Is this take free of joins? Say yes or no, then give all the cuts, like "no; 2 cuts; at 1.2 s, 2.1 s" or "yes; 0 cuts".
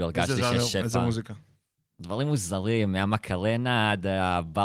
yes; 0 cuts